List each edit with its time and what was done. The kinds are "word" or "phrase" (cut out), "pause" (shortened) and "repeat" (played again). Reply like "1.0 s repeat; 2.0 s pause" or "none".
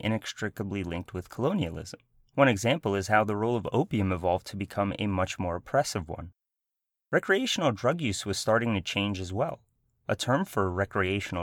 2.1 s pause